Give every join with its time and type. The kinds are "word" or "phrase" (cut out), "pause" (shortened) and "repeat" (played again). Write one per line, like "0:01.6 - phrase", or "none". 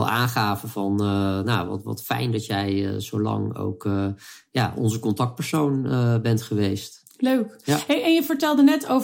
none